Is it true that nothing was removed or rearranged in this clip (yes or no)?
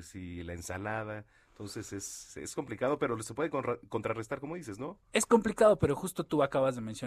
yes